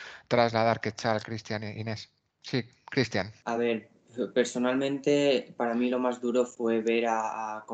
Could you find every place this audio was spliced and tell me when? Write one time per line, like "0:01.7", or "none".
none